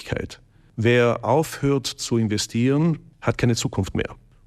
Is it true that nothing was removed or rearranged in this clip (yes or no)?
yes